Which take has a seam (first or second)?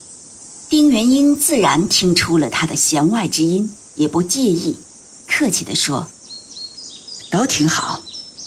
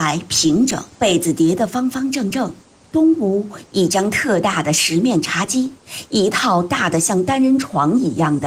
second